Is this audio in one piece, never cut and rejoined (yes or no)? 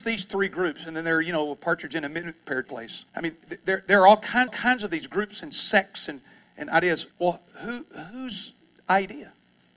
no